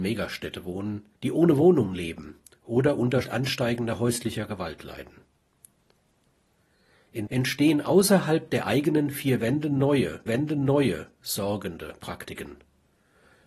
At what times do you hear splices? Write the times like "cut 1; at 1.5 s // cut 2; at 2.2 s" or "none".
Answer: cut 1; at 1.2 s // cut 2; at 3.2 s // cut 3; at 7.3 s // cut 4; at 10.3 s